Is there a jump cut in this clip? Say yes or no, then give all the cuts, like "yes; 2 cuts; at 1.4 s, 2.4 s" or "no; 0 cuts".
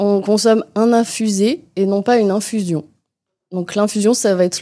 no; 0 cuts